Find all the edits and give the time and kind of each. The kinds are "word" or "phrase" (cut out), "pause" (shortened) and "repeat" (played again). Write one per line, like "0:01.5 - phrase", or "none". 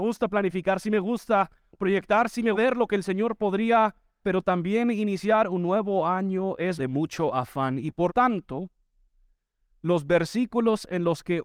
0:02.5 - word
0:04.2 - word
0:06.8 - word
0:08.1 - word

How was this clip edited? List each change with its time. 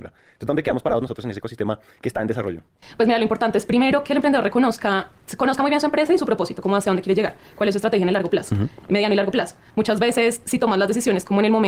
none

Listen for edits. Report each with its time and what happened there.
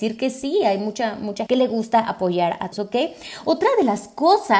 0:01.5 - word
0:02.7 - word

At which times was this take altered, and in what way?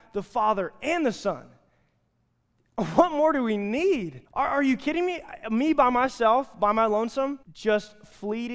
0:04.3 - pause
0:07.4 - pause

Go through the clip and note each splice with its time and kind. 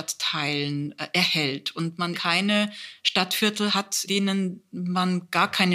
0:02.1 - word
0:04.1 - word

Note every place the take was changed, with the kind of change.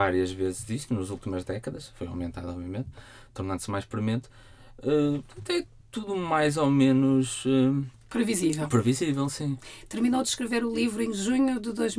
none

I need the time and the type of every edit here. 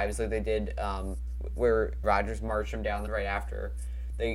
0:02.0 - word
0:03.1 - word

